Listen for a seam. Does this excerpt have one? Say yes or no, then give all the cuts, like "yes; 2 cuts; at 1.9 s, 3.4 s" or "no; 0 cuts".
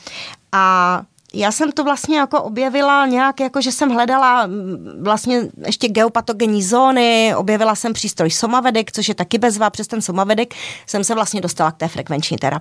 no; 0 cuts